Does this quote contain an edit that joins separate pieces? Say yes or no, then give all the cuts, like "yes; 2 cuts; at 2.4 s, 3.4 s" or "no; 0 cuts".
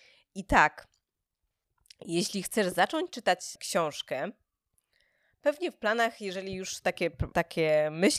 no; 0 cuts